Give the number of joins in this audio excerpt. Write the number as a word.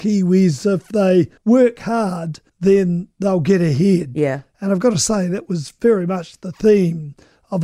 two